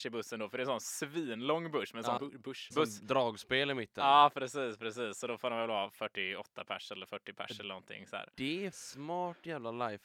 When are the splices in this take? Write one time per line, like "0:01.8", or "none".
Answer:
0:02.2
0:02.7
0:08.7

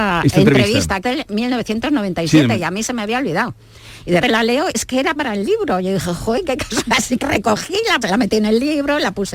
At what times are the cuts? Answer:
0:01.0
0:04.2
0:04.7
0:05.2
0:07.2
0:08.0

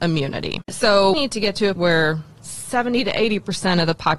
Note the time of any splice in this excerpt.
0:01.1
0:01.8

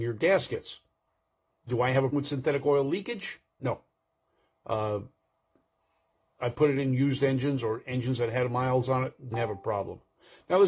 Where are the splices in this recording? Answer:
0:02.1
0:09.3

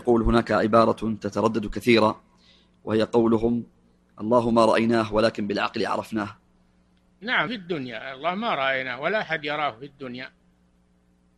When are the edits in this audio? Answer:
0:07.5

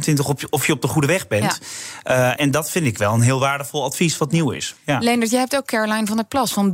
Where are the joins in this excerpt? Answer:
0:02.4

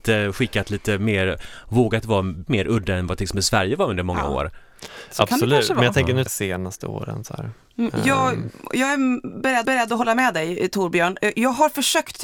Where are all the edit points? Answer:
0:02.5
0:06.3
0:09.6

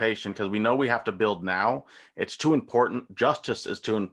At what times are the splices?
none

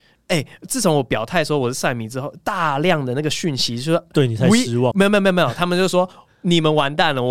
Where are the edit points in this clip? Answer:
0:04.9

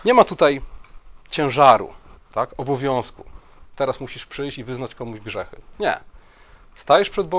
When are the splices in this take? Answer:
none

